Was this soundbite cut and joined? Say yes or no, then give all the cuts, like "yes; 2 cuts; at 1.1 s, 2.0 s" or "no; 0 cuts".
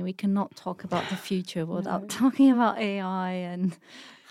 no; 0 cuts